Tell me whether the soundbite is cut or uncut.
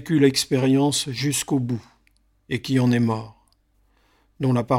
uncut